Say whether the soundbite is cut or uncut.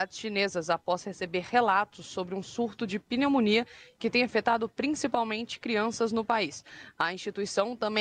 uncut